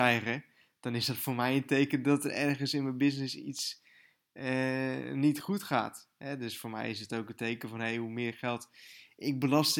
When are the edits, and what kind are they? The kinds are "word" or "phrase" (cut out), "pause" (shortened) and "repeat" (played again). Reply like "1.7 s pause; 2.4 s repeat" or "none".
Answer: none